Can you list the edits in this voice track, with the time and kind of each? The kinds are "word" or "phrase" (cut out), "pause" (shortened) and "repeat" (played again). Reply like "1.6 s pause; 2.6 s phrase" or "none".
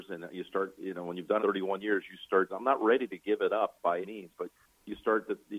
1.4 s word; 2.5 s word; 4.0 s word

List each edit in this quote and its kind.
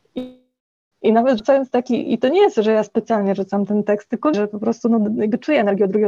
0.9 s word; 4.3 s word

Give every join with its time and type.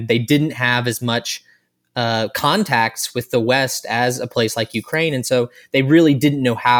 none

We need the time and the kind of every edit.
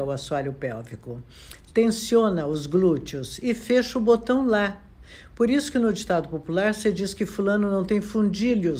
none

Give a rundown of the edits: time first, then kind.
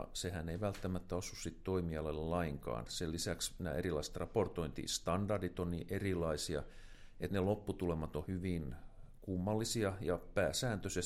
7.3 s word; 8.3 s word

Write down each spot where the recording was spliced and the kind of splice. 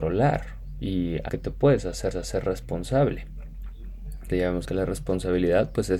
1.3 s word; 2.1 s repeat; 4.3 s word; 4.6 s word

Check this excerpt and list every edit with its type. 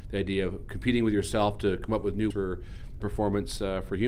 2.3 s word; 3.0 s word

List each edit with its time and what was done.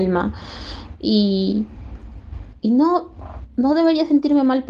none

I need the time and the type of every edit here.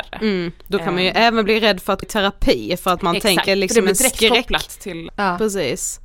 2.0 s word; 3.5 s phrase; 5.1 s word

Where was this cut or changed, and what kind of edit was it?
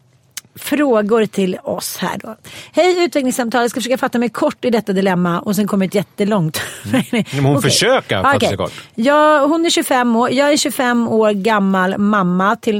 none

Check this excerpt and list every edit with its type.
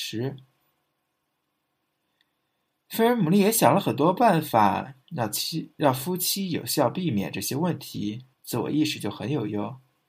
5.0 s pause; 8.3 s pause

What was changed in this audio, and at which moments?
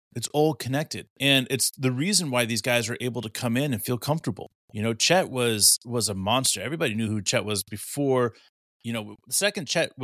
1.1 s pause; 4.6 s pause

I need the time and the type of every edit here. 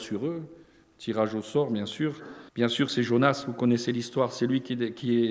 2.5 s pause

